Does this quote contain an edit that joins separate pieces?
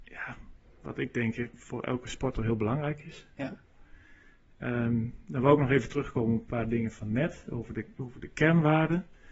no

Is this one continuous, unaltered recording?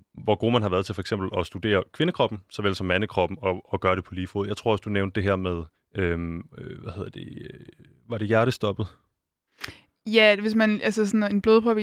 no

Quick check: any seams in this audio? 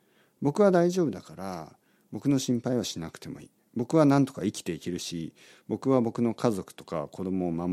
no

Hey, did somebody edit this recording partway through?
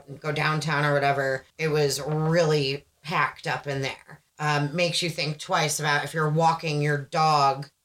yes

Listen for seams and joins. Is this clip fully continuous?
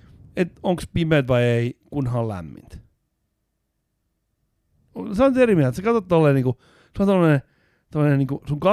yes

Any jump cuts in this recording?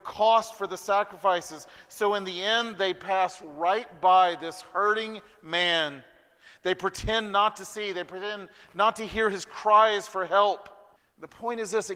yes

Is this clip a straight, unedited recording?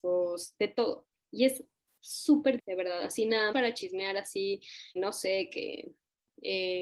no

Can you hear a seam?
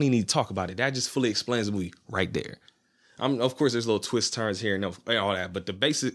no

